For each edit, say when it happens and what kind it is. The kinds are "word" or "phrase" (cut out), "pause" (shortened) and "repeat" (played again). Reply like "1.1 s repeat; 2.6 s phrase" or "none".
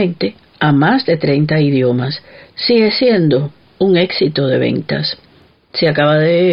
none

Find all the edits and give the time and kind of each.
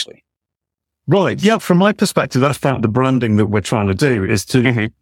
1.6 s word

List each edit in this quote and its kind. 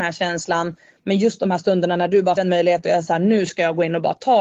2.4 s word

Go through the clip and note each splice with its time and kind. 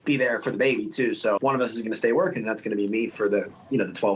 1.4 s word; 3.1 s word

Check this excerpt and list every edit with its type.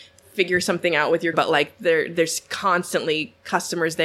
1.3 s word

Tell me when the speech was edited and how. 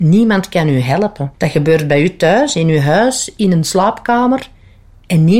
1.3 s pause

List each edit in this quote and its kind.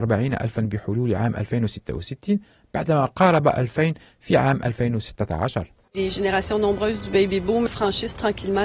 none

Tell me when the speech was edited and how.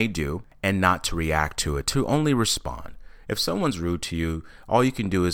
none

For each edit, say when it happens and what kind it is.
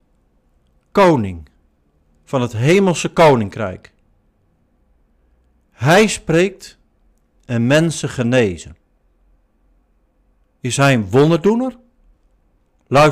none

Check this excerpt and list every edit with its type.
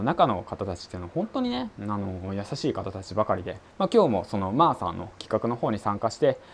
3.6 s pause

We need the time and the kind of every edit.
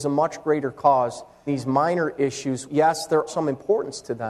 1.5 s word; 2.7 s word; 3.3 s word

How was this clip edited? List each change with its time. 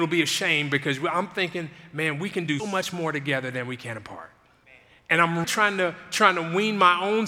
2.6 s word; 4.6 s pause; 5.4 s word

